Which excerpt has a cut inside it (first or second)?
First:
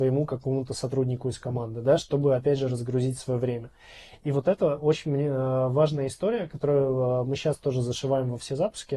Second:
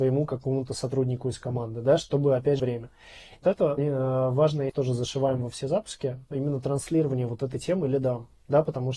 second